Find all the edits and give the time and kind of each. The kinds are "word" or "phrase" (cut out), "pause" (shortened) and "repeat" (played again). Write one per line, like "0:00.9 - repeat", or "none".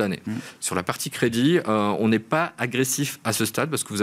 none